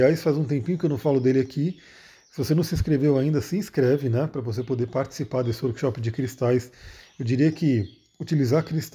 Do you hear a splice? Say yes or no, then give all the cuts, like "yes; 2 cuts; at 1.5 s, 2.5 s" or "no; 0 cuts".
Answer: no; 0 cuts